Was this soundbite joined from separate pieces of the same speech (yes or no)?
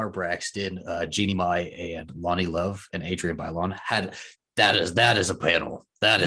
no